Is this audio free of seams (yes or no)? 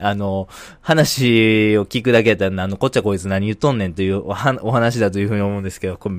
yes